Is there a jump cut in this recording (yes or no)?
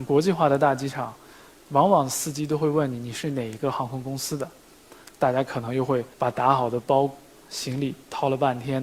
yes